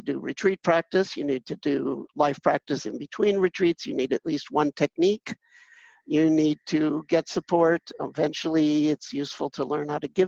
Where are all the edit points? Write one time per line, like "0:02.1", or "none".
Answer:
none

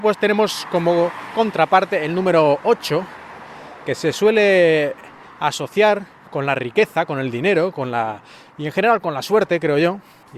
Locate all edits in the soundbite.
none

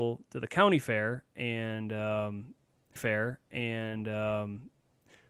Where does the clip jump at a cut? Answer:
0:03.0

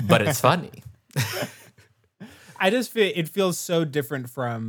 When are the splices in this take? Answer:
none

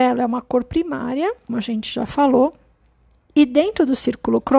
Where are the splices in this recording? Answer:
0:01.5

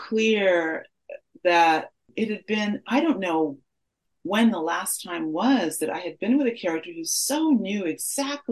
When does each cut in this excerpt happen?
none

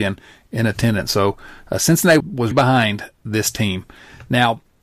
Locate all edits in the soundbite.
0:02.2
0:02.5

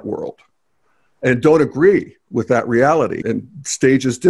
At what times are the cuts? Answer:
0:03.2

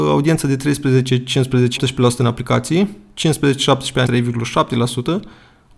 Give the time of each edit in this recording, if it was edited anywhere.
0:01.8
0:04.1

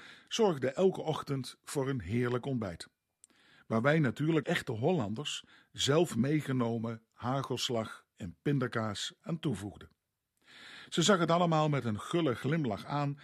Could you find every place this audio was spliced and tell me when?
0:04.4

